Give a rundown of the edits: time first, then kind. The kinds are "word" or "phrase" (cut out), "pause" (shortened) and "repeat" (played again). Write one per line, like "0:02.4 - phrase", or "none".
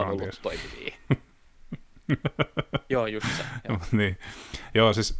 none